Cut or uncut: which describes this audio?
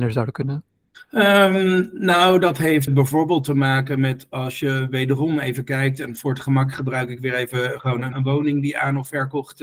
cut